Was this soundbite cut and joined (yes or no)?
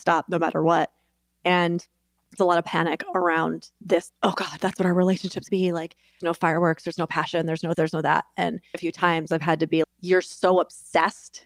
yes